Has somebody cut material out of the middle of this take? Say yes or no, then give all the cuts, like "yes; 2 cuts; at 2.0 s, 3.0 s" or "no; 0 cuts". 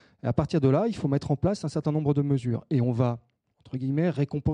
no; 0 cuts